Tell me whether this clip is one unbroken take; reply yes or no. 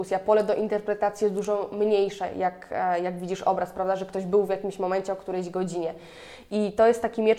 yes